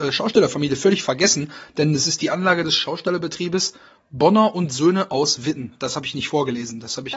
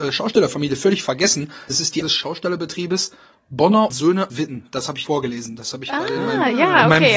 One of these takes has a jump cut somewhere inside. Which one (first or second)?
second